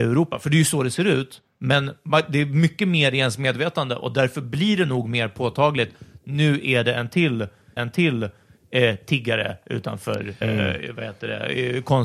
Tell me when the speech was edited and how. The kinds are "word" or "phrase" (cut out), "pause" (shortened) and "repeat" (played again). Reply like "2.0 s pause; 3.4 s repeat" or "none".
7.8 s repeat; 10.4 s word